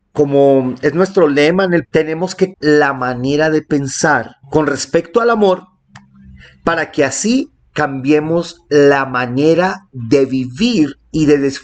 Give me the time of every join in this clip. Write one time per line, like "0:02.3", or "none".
0:01.8
0:02.5
0:04.4

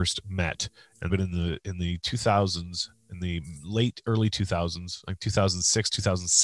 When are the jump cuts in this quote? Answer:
0:01.1

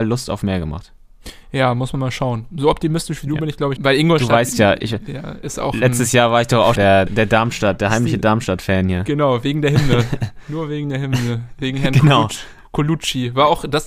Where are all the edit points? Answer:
0:03.8
0:06.8
0:07.1

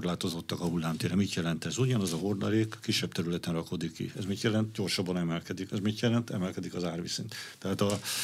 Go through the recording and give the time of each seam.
none

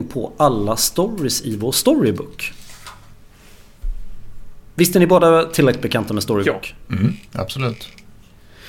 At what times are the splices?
0:04.7

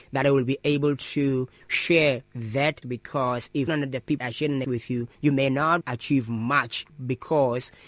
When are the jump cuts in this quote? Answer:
0:02.8
0:03.7
0:04.2
0:04.6
0:05.1
0:05.8

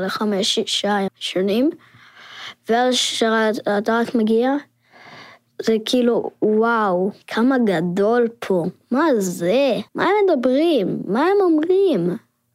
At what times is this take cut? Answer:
0:01.1
0:07.2
0:09.9

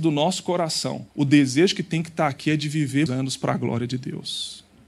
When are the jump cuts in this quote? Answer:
0:01.1
0:03.1

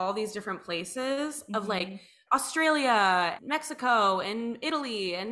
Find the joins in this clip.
0:03.4

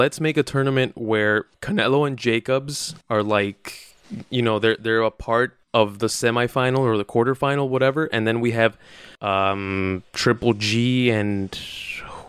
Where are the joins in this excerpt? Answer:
0:01.5
0:03.0
0:05.6
0:09.1

